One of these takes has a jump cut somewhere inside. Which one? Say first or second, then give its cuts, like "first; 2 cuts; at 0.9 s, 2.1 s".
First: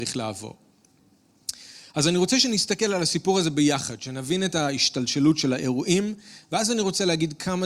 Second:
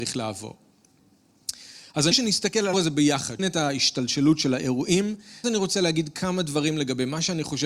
second; 4 cuts; at 2.1 s, 2.7 s, 3.4 s, 5.4 s